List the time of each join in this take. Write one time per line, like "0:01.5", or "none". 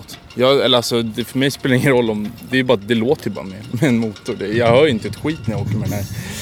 none